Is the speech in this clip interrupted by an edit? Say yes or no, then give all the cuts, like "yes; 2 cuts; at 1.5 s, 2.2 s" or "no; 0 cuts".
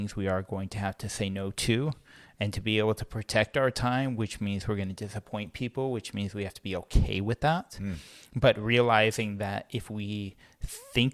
no; 0 cuts